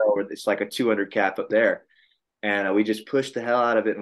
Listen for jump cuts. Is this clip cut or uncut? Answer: uncut